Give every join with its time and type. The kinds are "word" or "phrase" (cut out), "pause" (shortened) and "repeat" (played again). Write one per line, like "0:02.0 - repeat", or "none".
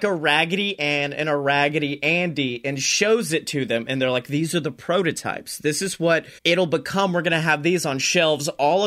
0:06.4 - pause